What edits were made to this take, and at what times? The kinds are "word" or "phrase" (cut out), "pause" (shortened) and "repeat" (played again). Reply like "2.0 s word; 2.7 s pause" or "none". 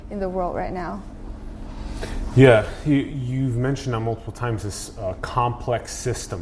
none